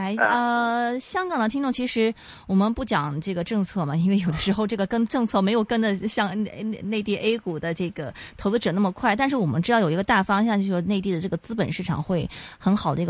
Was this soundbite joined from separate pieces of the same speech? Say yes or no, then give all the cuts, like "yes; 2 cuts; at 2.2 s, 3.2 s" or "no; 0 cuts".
no; 0 cuts